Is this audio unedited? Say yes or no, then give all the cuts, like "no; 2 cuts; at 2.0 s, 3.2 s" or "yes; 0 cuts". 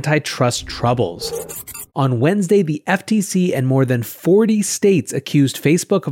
no; 1 cut; at 1.9 s